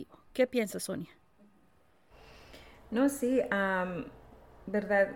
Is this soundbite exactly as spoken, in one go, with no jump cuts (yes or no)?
yes